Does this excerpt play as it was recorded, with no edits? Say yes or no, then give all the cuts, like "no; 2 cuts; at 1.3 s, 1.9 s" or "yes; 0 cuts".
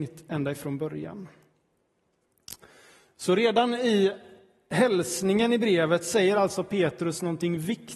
yes; 0 cuts